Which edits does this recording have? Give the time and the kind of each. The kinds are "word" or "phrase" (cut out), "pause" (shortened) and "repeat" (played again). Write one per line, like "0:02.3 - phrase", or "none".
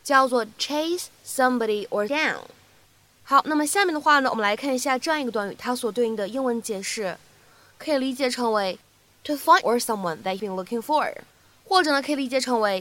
0:02.1 - word
0:09.6 - word
0:10.4 - word